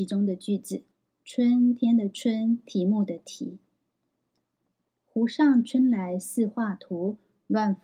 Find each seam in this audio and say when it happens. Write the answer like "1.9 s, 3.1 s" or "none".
0.9 s